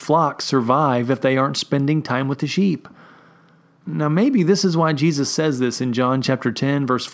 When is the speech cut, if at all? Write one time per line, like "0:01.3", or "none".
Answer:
none